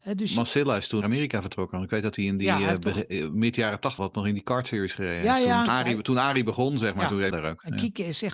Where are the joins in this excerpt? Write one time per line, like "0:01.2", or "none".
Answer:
0:01.0
0:04.0
0:05.7
0:07.3

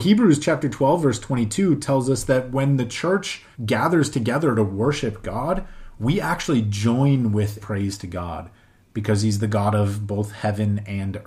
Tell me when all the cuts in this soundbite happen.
0:03.5
0:07.6

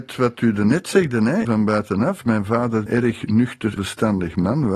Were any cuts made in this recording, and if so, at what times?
0:01.4
0:02.9
0:03.8

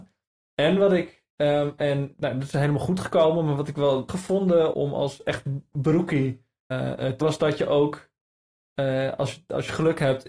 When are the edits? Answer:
0:01.3
0:02.1
0:04.1
0:04.7
0:06.7
0:07.2

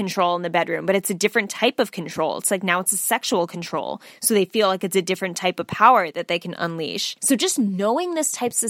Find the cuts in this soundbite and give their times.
0:07.2

